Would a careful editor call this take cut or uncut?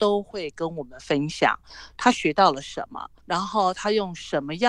cut